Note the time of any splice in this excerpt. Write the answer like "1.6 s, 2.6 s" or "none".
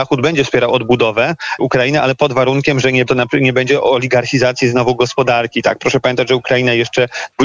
1.6 s, 3.1 s